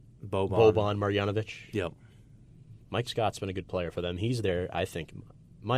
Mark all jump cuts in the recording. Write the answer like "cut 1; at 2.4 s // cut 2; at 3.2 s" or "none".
cut 1; at 2.8 s